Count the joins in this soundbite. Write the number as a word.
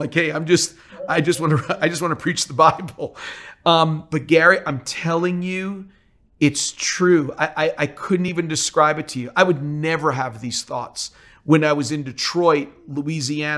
zero